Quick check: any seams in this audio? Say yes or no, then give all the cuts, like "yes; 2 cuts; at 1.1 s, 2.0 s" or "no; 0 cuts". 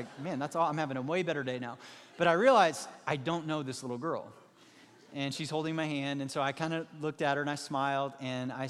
no; 0 cuts